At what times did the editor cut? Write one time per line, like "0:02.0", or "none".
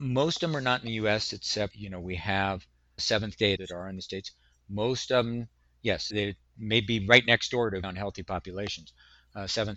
0:01.7
0:03.0
0:03.6
0:04.0
0:06.1
0:07.8